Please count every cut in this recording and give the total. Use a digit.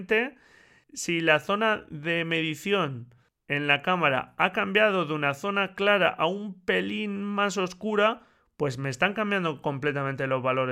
0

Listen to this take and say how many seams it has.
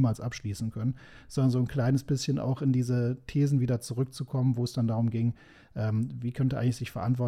0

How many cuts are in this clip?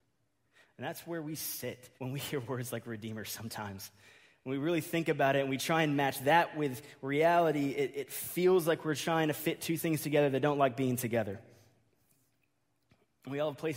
1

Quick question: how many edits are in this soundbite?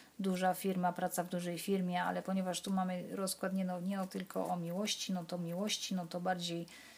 2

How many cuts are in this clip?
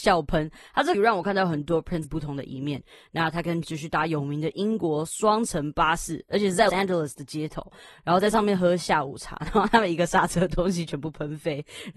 4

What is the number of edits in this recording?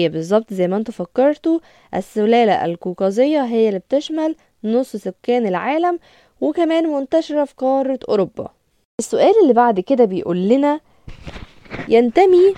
0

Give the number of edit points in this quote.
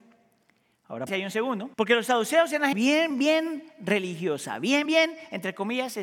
5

